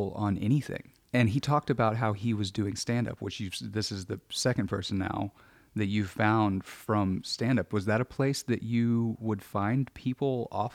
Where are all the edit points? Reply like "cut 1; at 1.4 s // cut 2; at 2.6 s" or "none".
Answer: none